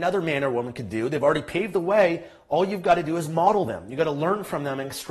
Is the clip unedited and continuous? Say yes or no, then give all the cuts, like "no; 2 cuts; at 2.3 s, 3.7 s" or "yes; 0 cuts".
yes; 0 cuts